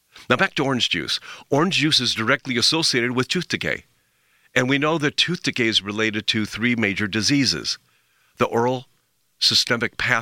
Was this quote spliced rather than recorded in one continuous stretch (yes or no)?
no